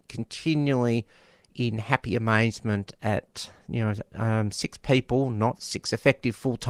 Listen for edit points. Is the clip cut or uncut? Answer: uncut